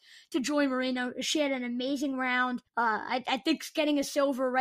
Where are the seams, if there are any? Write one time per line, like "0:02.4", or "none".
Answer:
0:02.7